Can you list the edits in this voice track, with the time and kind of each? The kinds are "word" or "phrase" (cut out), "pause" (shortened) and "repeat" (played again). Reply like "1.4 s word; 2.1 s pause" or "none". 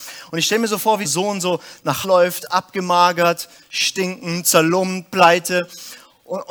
1.0 s word; 2.0 s word